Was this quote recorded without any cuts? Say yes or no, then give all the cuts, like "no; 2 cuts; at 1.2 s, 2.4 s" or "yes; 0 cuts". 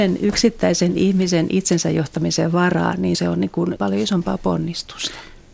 no; 2 cuts; at 3.1 s, 3.8 s